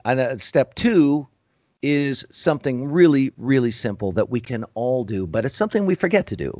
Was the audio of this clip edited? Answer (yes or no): no